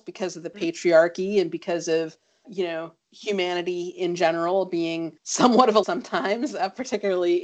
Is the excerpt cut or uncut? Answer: cut